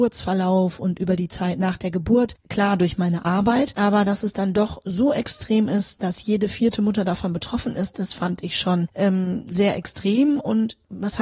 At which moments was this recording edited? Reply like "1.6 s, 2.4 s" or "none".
none